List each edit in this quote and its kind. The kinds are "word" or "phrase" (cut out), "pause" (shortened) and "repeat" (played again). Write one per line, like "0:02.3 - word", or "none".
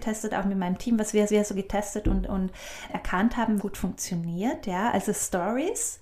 0:01.3 - repeat
0:02.9 - word
0:03.6 - phrase

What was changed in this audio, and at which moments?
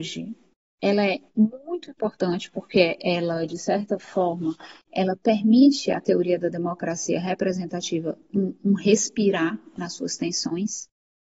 none

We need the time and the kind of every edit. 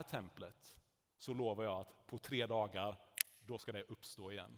none

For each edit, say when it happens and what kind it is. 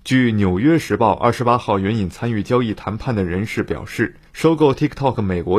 0:04.3 - pause

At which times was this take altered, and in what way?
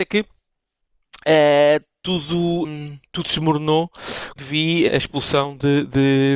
0:02.6 - word
0:04.4 - word
0:04.9 - word

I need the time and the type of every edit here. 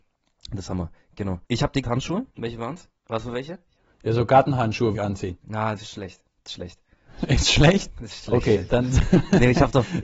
0:01.4 - pause
0:01.8 - word
0:02.3 - pause
0:03.0 - pause
0:03.7 - pause
0:04.9 - word
0:05.8 - word
0:08.2 - word

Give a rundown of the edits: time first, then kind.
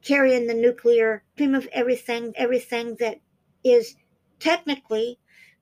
0:01.4 - phrase
0:02.3 - repeat

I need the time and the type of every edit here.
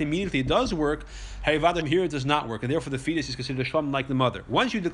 0:01.8 - word

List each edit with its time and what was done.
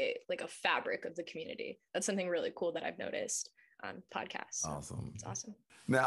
0:04.1 - phrase

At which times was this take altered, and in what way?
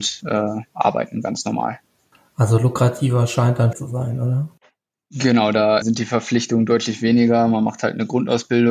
0:02.1 - pause
0:03.7 - phrase
0:05.8 - word

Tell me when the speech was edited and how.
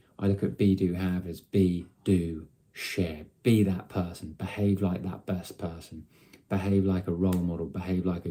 0:01.9 - pause

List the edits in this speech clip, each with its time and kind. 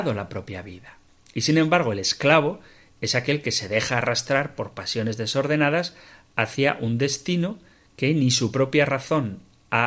none

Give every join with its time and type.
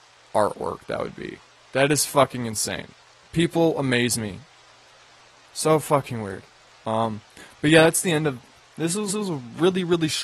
0:09.1 - repeat

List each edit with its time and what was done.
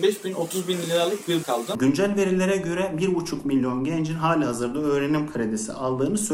0:01.4 - phrase

